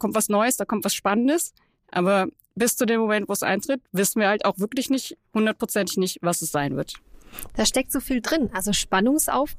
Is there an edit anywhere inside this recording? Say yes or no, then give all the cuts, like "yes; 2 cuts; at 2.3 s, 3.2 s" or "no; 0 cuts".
no; 0 cuts